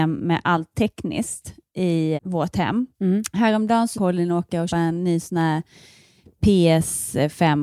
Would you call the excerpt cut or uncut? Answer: cut